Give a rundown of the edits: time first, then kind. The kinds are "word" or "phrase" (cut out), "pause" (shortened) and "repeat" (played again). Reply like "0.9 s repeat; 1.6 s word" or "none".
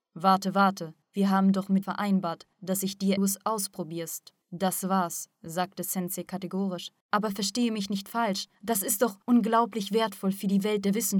1.0 s pause; 1.8 s word; 2.5 s pause; 3.2 s phrase; 4.4 s pause; 5.3 s pause; 7.0 s pause; 8.5 s pause; 9.2 s pause